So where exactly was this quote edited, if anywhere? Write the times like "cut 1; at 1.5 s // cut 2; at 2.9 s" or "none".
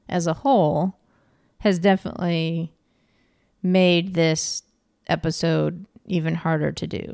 none